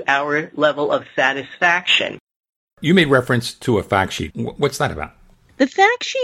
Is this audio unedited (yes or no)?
yes